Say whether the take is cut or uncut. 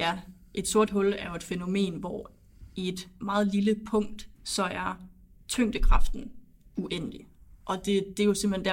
cut